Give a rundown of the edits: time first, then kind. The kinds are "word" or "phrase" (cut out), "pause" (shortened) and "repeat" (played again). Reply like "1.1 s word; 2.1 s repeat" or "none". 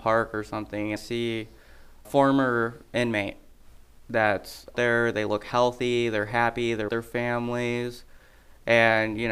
1.0 s word; 2.0 s word; 4.7 s word; 6.9 s word